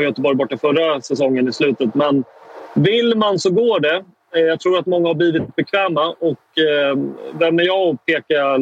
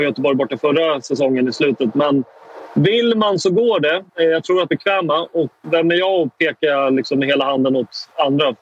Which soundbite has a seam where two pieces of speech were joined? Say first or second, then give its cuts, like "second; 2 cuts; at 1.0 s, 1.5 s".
second; 3 cuts; at 4.1 s, 4.7 s, 5.6 s